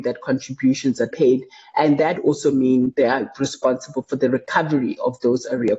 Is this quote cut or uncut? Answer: cut